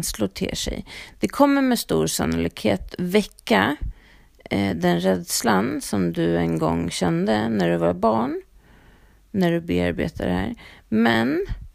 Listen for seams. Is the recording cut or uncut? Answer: uncut